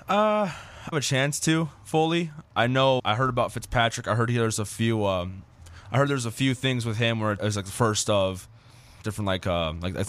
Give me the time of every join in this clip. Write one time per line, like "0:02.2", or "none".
0:00.9
0:03.0
0:07.4
0:09.0

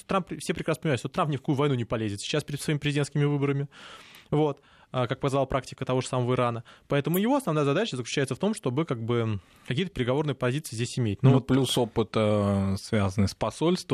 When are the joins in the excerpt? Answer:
none

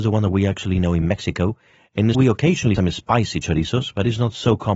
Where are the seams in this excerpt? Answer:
0:02.1
0:02.8

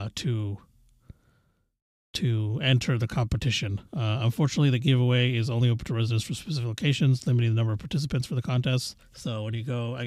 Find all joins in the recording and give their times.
0:03.9
0:09.0

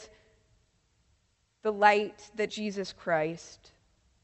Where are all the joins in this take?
0:02.5

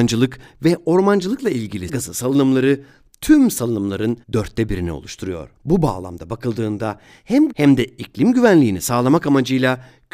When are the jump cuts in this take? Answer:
0:01.9
0:04.2
0:05.6
0:07.5

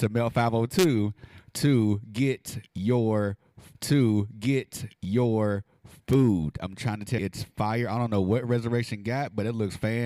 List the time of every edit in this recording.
0:03.7
0:07.2

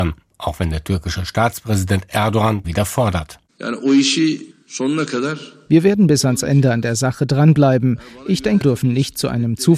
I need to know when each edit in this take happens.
0:02.6
0:04.5
0:08.6

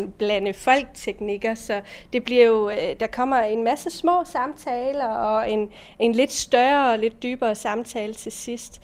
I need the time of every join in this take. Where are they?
none

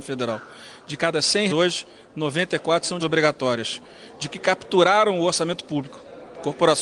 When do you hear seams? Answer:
0:01.5
0:03.0
0:04.3

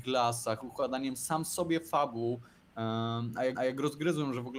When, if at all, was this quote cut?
0:03.5

